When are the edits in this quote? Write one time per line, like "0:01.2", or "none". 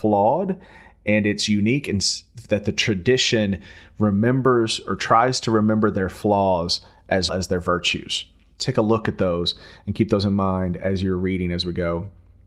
0:07.3